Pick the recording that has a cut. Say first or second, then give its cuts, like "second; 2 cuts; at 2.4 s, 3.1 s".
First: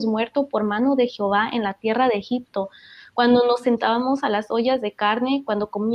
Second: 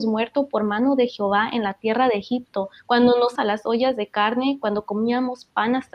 second; 2 cuts; at 2.8 s, 3.4 s